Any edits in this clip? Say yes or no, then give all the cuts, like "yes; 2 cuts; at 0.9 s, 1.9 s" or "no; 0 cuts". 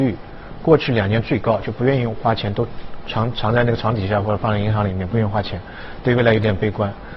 no; 0 cuts